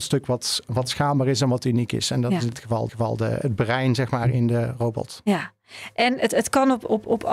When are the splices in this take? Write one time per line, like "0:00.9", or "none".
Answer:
0:02.9